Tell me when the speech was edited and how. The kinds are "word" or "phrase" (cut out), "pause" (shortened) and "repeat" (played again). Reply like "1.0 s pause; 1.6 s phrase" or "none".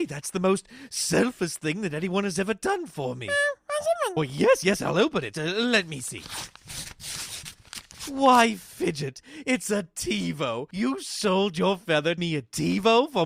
4.2 s word; 12.2 s phrase